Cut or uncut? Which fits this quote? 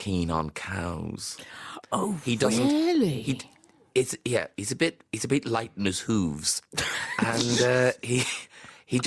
cut